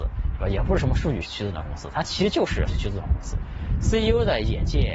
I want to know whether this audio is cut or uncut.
cut